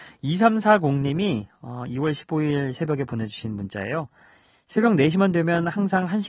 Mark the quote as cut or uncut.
uncut